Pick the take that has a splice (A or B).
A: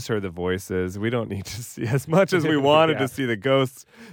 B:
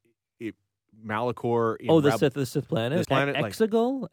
B